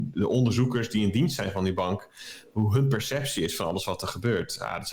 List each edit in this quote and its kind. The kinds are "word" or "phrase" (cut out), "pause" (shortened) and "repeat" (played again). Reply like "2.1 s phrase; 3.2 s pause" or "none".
none

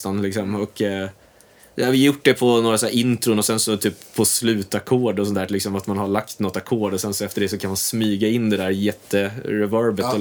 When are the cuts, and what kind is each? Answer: none

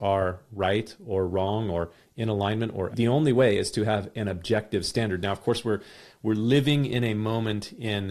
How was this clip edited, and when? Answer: 2.9 s phrase

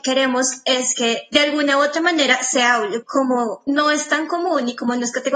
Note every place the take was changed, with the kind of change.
3.0 s word

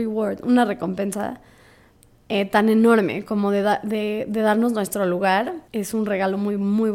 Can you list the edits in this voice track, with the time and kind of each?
5.7 s pause

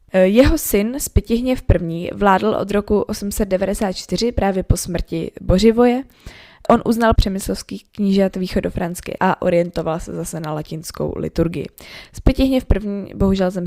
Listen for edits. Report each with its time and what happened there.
7.2 s word; 9.2 s word

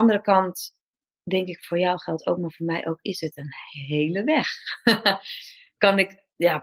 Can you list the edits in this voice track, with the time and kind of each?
none

